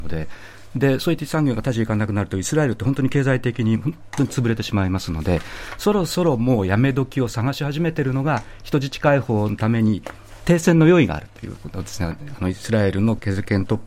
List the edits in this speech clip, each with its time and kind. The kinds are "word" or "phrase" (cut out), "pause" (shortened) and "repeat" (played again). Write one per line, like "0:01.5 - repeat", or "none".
0:01.2 - word

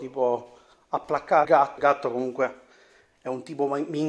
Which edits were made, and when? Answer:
0:01.4 - word
0:01.8 - word

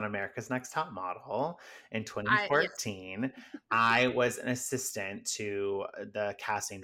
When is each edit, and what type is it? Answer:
none

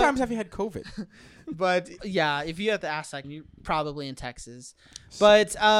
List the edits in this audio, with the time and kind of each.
0:02.0 - word
0:03.2 - word

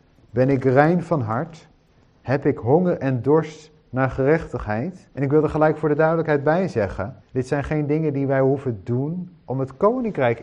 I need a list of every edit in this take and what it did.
0:05.1 - pause
0:07.2 - pause

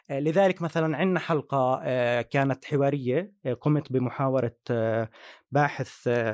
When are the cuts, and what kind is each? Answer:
none

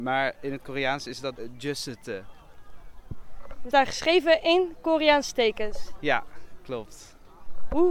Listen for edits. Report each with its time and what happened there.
0:01.4 - word
0:03.7 - word

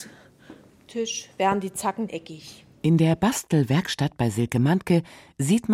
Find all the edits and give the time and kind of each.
0:02.1 - word

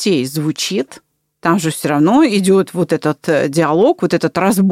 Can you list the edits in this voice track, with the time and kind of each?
none

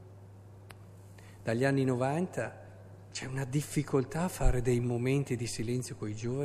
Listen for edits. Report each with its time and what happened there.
none

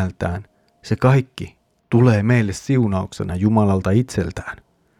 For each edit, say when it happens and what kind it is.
none

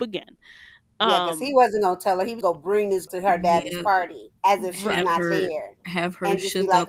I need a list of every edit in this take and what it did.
0:02.4 - word
0:03.1 - word
0:04.4 - pause

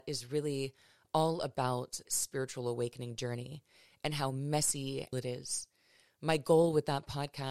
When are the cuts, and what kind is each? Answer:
0:02.0 - word
0:05.1 - phrase

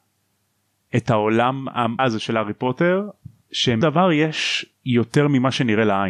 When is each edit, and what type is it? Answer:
0:02.0 - word
0:03.8 - phrase

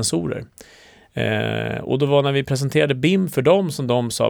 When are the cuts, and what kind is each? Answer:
none

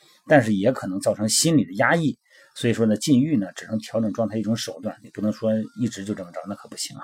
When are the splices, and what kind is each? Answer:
none

